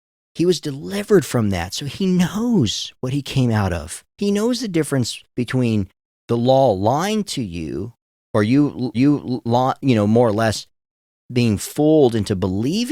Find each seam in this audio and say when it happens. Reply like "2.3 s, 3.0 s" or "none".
4.1 s, 5.3 s, 8.9 s